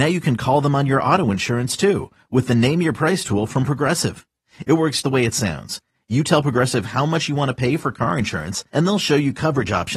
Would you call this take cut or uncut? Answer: cut